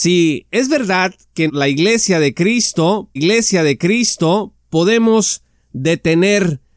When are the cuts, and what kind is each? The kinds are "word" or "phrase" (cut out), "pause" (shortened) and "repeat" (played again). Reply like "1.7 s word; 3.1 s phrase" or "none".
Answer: 1.5 s word; 3.2 s repeat